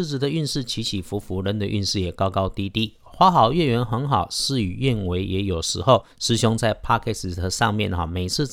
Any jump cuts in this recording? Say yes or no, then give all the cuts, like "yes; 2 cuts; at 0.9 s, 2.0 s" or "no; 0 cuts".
yes; 1 cut; at 6.1 s